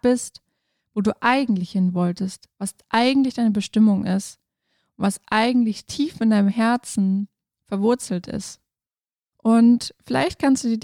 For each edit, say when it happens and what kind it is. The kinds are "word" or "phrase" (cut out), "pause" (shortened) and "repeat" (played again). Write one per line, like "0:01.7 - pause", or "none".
none